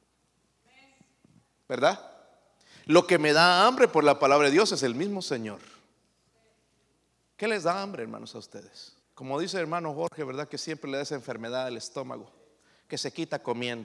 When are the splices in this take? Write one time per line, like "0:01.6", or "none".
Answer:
0:09.0